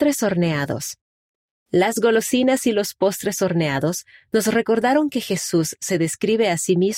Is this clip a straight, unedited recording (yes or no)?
yes